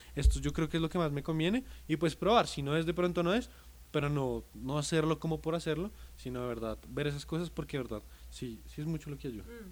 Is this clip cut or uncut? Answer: uncut